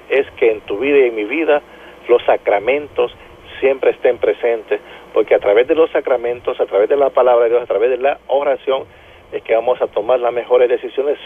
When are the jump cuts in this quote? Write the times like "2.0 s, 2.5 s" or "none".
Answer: none